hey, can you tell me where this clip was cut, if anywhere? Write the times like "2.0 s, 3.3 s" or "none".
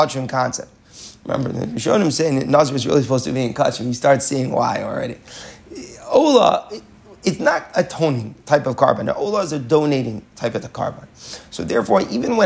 none